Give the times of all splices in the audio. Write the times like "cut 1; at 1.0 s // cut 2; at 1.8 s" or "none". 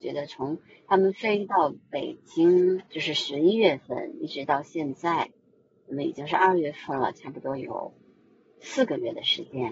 cut 1; at 1.8 s // cut 2; at 2.9 s